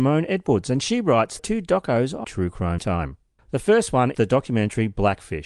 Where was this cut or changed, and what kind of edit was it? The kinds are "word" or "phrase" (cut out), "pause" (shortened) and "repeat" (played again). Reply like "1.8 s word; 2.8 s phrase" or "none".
1.4 s phrase; 2.2 s phrase; 2.8 s word; 3.4 s pause; 4.1 s word